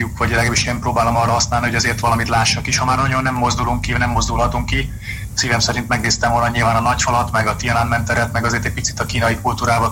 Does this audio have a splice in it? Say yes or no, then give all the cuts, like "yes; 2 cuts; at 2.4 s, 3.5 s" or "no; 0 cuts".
no; 0 cuts